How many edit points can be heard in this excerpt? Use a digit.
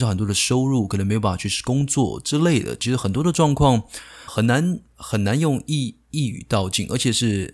1